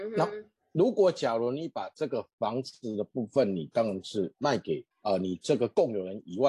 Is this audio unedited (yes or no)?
no